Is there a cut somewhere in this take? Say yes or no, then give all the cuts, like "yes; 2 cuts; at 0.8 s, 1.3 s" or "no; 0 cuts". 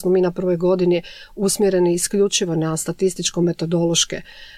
no; 0 cuts